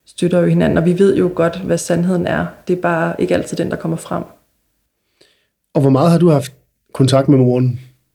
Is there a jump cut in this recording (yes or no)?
no